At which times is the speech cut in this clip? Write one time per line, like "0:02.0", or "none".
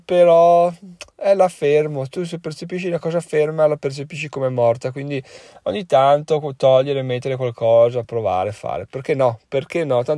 none